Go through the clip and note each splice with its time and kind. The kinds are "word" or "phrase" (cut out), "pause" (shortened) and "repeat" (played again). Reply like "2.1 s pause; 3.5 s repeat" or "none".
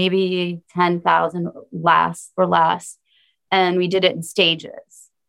none